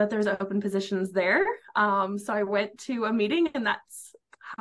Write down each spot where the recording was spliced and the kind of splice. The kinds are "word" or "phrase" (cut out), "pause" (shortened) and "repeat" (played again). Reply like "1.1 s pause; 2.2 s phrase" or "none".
none